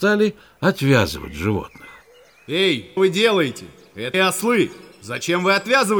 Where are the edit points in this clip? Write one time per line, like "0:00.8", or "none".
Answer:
0:03.0
0:04.1